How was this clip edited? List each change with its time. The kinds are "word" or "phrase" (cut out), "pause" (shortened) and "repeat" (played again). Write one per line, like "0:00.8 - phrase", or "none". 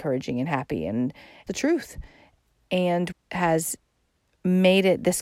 0:01.5 - phrase
0:03.1 - phrase